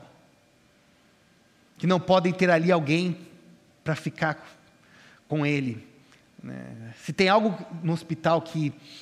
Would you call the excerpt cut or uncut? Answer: uncut